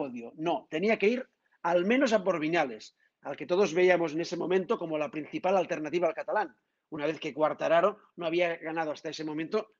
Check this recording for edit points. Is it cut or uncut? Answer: uncut